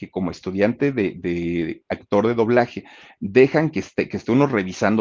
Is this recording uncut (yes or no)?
yes